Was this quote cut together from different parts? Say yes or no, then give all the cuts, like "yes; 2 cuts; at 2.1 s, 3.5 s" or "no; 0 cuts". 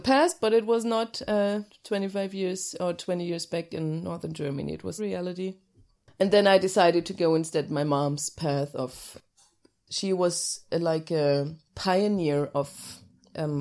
yes; 2 cuts; at 1.7 s, 5.0 s